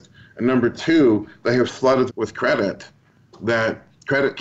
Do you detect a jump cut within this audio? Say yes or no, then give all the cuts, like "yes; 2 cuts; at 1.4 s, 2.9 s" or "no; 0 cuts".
yes; 2 cuts; at 1.7 s, 2.1 s